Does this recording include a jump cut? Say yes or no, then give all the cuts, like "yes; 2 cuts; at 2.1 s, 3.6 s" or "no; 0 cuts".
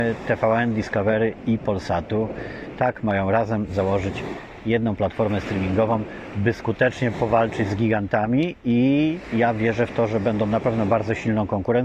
no; 0 cuts